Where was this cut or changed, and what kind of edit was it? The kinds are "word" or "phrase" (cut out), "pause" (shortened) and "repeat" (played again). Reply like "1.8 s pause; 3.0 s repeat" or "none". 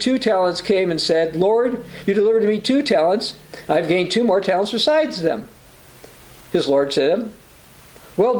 none